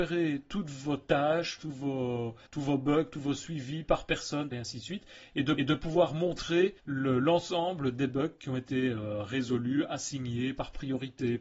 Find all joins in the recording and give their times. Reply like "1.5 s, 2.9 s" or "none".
2.5 s, 4.5 s, 5.6 s, 6.8 s